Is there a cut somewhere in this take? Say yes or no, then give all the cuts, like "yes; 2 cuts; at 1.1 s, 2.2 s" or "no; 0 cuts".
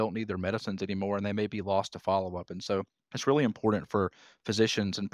no; 0 cuts